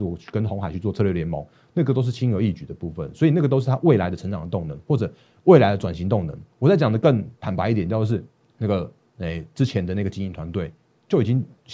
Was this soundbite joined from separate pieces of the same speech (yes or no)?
yes